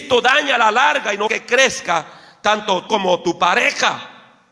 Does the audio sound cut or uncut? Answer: cut